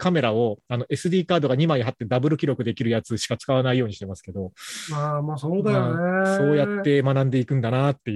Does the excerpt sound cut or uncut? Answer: uncut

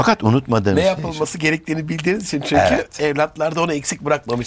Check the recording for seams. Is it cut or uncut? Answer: uncut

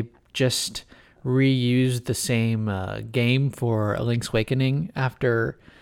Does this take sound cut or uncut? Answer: uncut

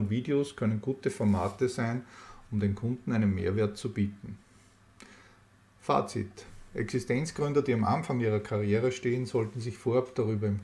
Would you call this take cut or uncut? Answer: uncut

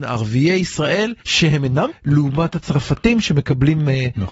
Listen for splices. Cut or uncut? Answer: cut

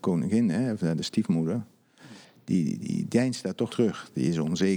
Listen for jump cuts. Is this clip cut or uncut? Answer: cut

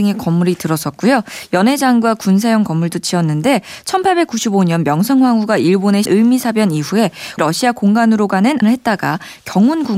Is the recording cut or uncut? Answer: cut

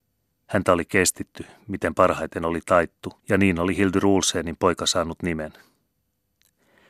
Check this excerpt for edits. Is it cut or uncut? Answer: cut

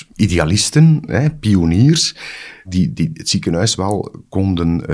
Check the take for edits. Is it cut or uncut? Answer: uncut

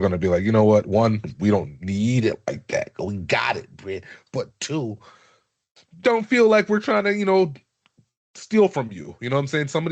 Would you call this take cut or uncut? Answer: uncut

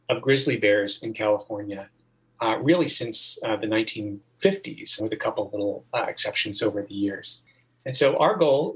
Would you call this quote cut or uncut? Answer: uncut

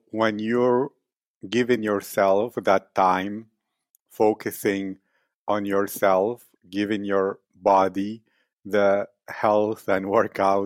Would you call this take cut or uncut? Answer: uncut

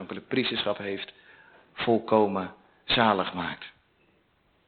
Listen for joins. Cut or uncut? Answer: uncut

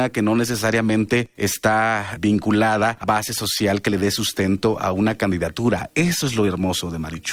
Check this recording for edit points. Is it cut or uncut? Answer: cut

